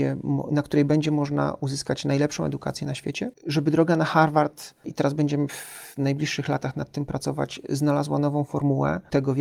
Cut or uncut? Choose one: uncut